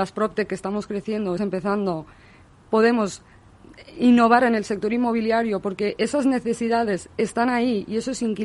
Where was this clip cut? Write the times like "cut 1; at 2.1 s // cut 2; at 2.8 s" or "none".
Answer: cut 1; at 1.4 s